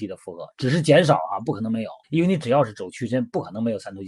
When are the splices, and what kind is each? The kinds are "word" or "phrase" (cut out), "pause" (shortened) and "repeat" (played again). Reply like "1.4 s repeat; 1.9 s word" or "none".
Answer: 2.0 s pause

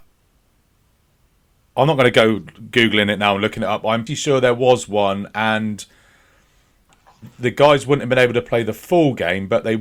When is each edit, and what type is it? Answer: 4.1 s word

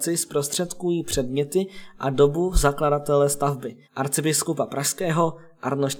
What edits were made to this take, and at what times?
3.8 s pause

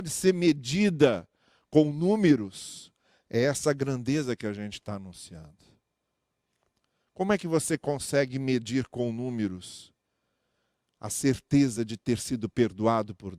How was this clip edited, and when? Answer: none

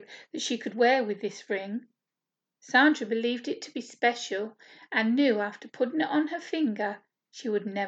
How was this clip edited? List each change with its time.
none

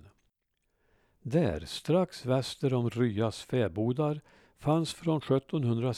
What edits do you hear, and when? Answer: none

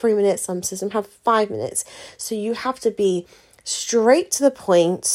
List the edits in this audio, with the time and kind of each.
none

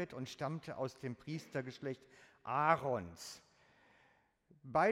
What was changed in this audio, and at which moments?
none

